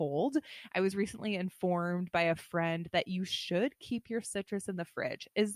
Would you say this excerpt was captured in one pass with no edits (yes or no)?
yes